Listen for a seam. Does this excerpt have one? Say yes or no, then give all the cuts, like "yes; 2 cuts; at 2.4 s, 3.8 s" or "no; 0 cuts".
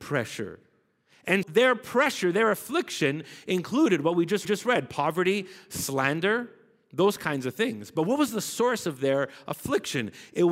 yes; 2 cuts; at 1.4 s, 4.4 s